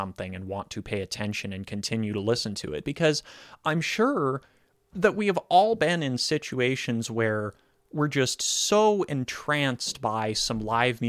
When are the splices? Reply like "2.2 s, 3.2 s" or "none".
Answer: none